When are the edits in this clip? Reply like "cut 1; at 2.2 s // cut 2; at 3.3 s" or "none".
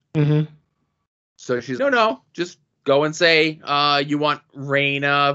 cut 1; at 1.8 s

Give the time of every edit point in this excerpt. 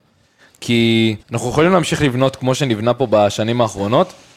cut 1; at 1.2 s

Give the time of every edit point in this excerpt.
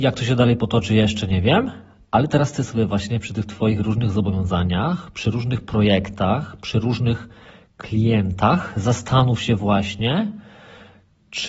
none

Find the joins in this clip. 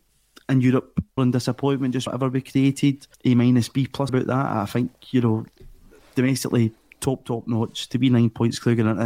cut 1; at 1.2 s // cut 2; at 2.1 s // cut 3; at 3.1 s // cut 4; at 4.1 s

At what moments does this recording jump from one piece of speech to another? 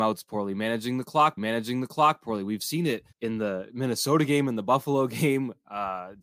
cut 1; at 1.4 s // cut 2; at 3.1 s

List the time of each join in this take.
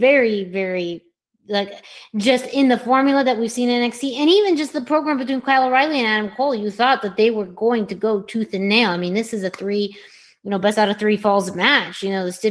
cut 1; at 1.2 s

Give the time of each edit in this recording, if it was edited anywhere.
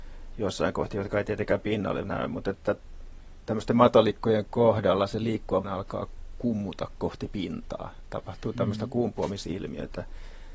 cut 1; at 2.0 s // cut 2; at 5.6 s

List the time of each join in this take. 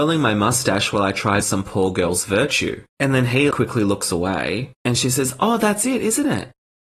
cut 1; at 1.4 s // cut 2; at 2.9 s // cut 3; at 3.5 s // cut 4; at 4.7 s

